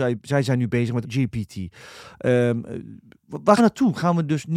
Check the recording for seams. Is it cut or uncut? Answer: cut